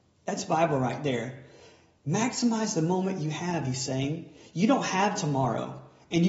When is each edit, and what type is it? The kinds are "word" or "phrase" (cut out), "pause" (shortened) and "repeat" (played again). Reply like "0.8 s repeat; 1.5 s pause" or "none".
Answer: none